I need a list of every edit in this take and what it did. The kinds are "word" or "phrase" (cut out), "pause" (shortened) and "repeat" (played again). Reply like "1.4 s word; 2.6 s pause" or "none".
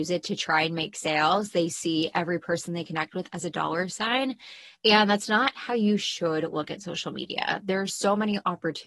none